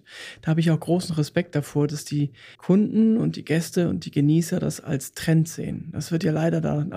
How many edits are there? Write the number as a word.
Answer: one